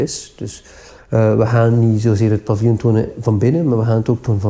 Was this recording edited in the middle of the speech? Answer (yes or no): no